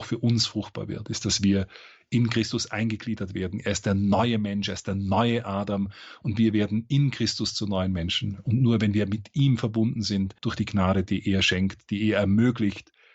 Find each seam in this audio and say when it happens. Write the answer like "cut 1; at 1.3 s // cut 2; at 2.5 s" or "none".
cut 1; at 10.4 s